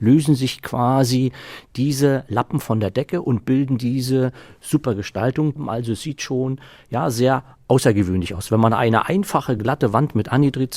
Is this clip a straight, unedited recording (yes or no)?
yes